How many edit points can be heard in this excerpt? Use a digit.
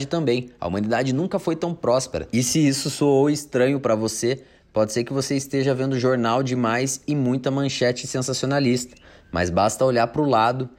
0